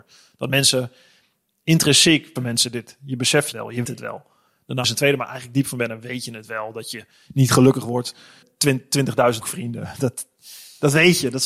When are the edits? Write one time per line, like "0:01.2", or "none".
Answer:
0:02.4
0:03.5
0:03.8
0:04.8
0:08.4
0:09.4